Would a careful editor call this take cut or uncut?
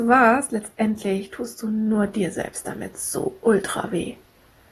uncut